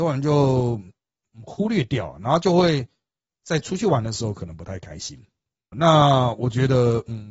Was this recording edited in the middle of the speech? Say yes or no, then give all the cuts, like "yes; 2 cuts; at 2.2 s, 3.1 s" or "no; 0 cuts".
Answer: yes; 1 cut; at 5.7 s